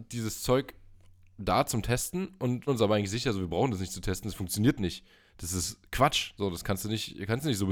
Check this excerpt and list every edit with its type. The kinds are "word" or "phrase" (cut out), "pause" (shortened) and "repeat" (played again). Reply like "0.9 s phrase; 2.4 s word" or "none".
2.7 s word